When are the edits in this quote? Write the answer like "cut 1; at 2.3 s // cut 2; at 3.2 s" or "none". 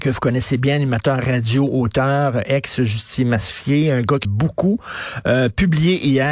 cut 1; at 4.2 s